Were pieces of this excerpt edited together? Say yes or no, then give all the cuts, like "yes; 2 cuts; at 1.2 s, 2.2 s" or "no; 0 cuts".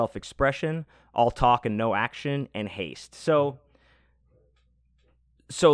no; 0 cuts